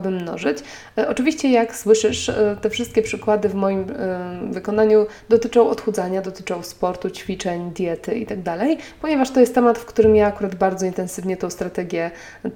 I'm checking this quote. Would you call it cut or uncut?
uncut